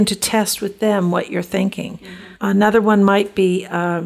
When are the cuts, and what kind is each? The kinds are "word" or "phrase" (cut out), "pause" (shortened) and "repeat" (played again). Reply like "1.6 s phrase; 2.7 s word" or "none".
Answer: 2.3 s pause